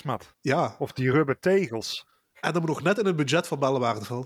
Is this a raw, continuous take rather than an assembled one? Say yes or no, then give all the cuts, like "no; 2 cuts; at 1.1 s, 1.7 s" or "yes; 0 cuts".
yes; 0 cuts